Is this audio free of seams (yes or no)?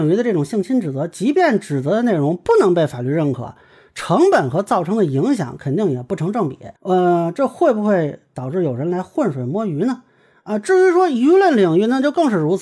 no